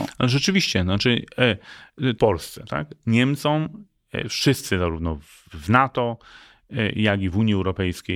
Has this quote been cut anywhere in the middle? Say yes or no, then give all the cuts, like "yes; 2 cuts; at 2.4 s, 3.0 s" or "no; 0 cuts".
yes; 1 cut; at 2.2 s